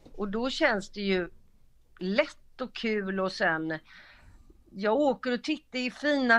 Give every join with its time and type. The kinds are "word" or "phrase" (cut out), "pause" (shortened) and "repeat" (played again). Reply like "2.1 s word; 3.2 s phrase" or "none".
none